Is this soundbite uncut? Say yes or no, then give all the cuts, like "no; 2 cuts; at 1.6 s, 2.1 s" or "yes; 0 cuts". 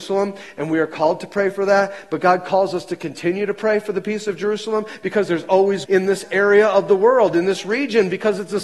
no; 1 cut; at 5.9 s